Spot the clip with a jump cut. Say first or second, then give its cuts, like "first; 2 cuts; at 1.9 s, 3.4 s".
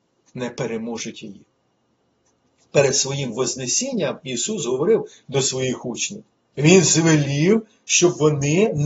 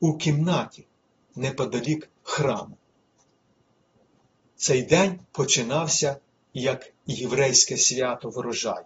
second; 2 cuts; at 2.2 s, 5.3 s